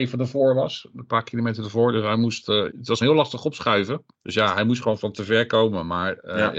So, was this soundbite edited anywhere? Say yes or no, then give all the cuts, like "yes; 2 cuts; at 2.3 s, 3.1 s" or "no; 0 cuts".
yes; 2 cuts; at 2.7 s, 3.0 s